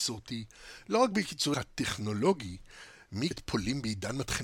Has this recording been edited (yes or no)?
yes